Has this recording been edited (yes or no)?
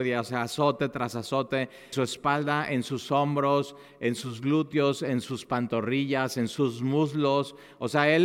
yes